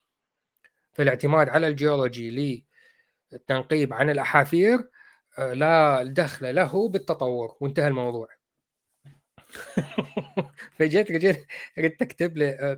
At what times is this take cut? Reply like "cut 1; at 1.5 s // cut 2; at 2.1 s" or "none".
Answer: none